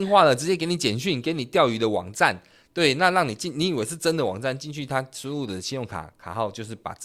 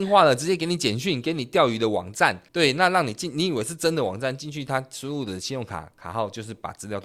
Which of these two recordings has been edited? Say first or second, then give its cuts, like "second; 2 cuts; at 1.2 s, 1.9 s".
second; 1 cut; at 2.5 s